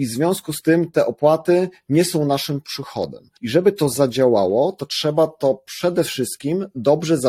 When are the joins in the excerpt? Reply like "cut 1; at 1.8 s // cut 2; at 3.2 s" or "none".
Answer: cut 1; at 3.4 s

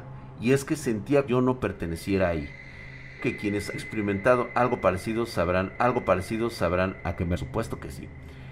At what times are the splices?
cut 1; at 1.3 s // cut 2; at 3.2 s // cut 3; at 3.7 s // cut 4; at 5.8 s // cut 5; at 7.4 s

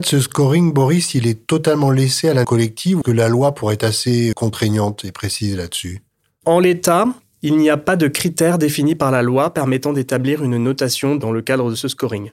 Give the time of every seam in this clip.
cut 1; at 2.4 s // cut 2; at 3.0 s // cut 3; at 4.3 s

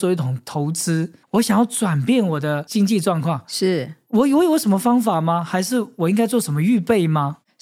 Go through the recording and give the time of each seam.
cut 1; at 1.2 s

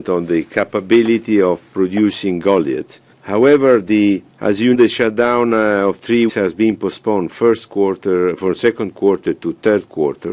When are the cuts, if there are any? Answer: cut 1; at 3.1 s // cut 2; at 4.3 s // cut 3; at 4.7 s // cut 4; at 6.3 s // cut 5; at 7.3 s

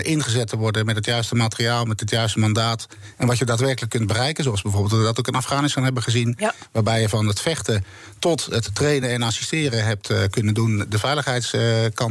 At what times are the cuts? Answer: none

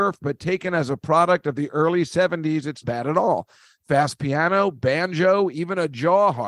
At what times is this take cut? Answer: cut 1; at 2.8 s

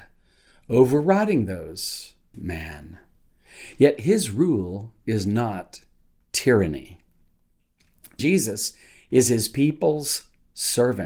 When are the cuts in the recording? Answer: cut 1; at 2.3 s // cut 2; at 8.2 s

